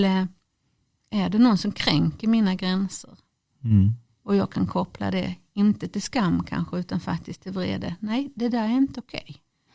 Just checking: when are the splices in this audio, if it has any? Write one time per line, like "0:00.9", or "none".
none